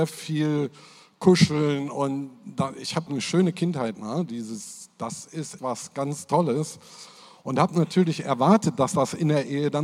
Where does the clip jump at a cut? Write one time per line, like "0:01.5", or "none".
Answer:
0:03.1
0:03.9
0:05.6